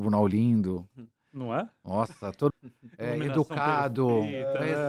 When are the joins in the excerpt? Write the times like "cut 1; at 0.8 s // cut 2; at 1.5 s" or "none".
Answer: cut 1; at 2.5 s